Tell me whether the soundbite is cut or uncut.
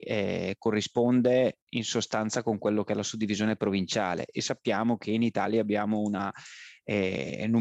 cut